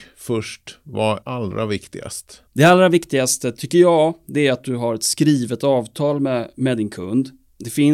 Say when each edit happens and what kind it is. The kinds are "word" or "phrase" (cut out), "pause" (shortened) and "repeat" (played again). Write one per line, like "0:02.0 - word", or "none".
0:01.2 - word
0:02.5 - pause